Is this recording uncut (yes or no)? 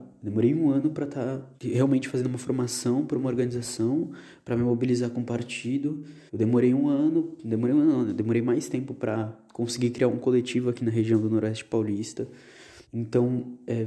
no